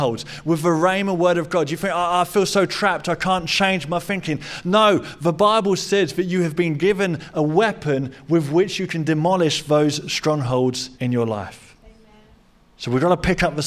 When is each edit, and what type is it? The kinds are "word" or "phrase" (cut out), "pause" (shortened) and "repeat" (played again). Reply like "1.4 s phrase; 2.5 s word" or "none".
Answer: 10.9 s pause

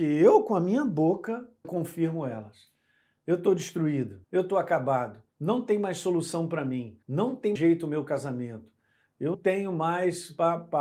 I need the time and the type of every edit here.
1.6 s word; 4.2 s pause; 5.3 s pause; 7.0 s pause; 7.6 s word; 9.3 s word

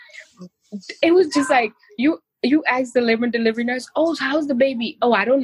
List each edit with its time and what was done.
none

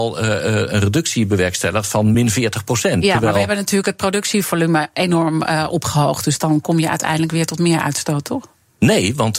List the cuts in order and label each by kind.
none

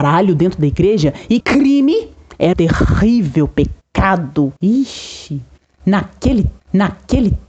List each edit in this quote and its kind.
1.4 s phrase; 2.5 s word; 4.6 s pause; 6.6 s repeat

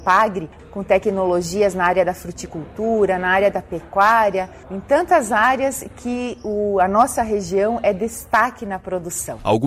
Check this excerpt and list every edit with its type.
none

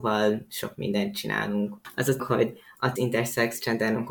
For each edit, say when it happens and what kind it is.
2.2 s word; 3.0 s word

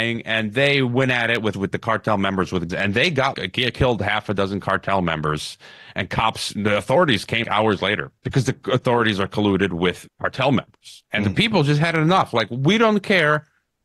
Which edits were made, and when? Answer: 1.5 s word; 2.7 s word; 3.3 s word; 7.4 s word; 8.2 s pause; 8.6 s pause; 10.1 s word; 11.1 s pause

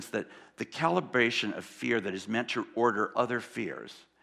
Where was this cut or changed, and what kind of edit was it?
3.1 s word

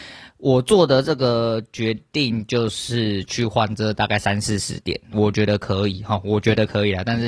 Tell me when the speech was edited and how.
5.1 s word

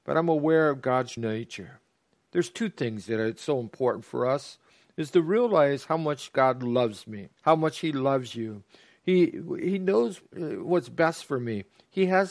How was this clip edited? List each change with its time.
1.2 s word; 7.4 s pause; 10.2 s word

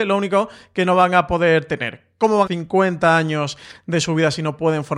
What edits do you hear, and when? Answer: 2.5 s phrase

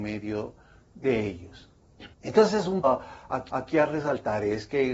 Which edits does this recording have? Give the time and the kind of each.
2.1 s pause; 2.8 s word; 3.5 s repeat

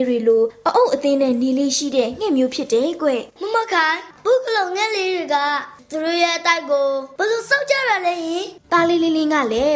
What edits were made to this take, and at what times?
3.3 s pause

